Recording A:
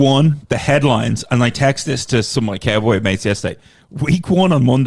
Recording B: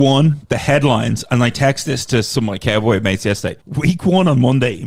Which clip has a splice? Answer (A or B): B